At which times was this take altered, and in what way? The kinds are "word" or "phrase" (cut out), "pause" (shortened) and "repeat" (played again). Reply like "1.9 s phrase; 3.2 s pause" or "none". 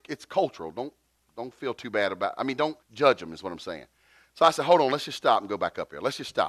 1.2 s word; 2.8 s pause